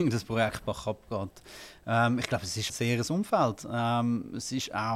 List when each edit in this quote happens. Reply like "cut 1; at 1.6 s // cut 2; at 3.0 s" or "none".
cut 1; at 2.7 s // cut 2; at 3.1 s